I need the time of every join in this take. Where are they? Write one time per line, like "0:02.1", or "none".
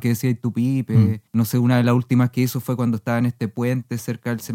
0:01.3

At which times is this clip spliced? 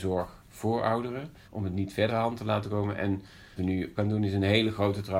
0:01.4
0:02.1
0:03.6
0:04.0

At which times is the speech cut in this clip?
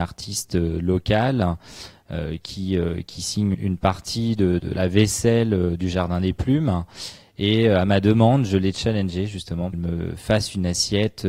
0:03.5
0:04.6
0:09.7

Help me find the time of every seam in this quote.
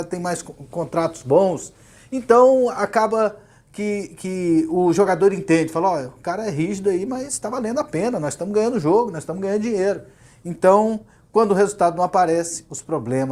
none

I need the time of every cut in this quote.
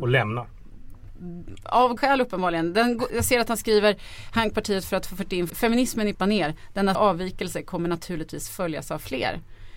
0:02.0
0:03.1
0:04.5
0:05.5
0:06.1
0:06.9

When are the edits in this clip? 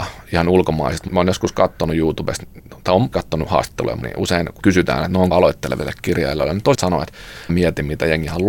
0:01.1
0:03.1
0:04.0
0:04.6
0:05.3
0:06.7
0:07.5

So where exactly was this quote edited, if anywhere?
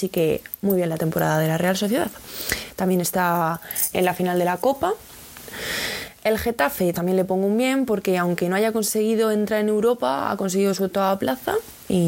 0:03.9
0:06.9

